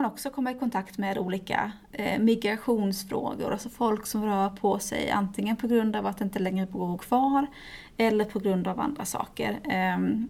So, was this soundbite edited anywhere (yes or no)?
yes